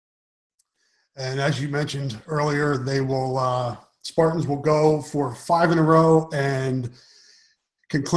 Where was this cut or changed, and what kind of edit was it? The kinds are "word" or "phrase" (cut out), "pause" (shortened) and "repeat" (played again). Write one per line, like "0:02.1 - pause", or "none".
none